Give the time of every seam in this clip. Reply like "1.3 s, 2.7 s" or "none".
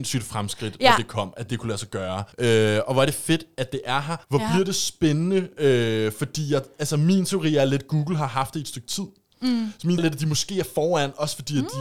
2.3 s, 4.2 s, 10.0 s